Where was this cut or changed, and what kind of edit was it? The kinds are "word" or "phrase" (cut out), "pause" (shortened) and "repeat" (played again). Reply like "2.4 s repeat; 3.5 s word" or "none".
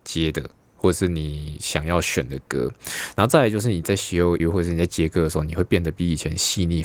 4.4 s word